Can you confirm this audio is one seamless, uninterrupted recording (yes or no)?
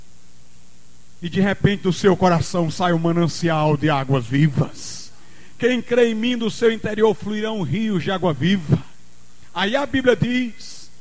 yes